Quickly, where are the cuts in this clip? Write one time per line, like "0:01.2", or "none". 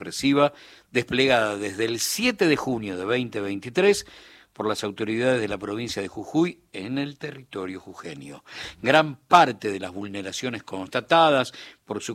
none